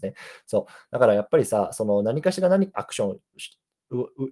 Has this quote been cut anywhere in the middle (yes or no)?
yes